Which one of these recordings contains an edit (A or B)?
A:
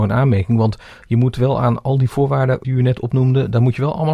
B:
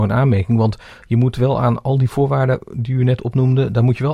A